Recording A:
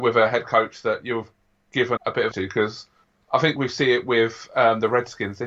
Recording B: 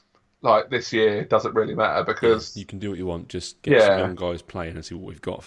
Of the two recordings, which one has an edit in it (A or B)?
A